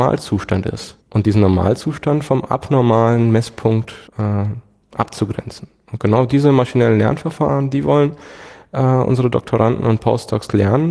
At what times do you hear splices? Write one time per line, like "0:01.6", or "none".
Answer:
0:01.0
0:04.1